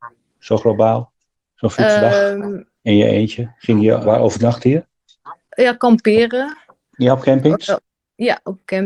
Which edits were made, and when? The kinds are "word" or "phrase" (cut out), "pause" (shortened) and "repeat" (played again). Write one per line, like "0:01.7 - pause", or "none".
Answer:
0:01.3 - pause
0:02.8 - pause
0:04.0 - word
0:05.4 - pause